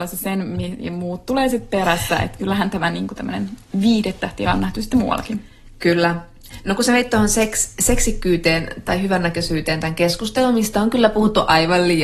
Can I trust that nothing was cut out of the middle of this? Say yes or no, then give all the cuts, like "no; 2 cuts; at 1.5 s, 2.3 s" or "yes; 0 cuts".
no; 2 cuts; at 2.4 s, 4.4 s